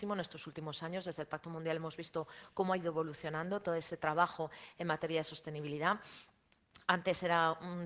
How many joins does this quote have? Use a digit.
0